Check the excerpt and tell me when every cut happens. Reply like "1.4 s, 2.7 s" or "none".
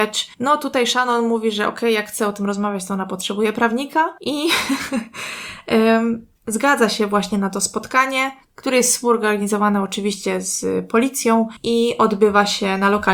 none